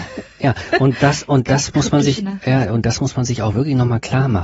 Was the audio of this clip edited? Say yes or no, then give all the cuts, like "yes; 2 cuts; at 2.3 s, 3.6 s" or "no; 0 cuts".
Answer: no; 0 cuts